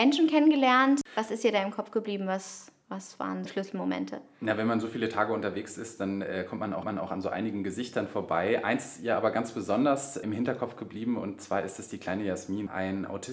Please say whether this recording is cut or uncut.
cut